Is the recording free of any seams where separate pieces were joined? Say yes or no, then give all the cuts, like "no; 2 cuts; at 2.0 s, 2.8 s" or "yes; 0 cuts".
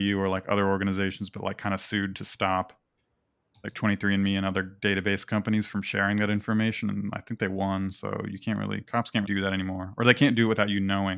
no; 1 cut; at 9.2 s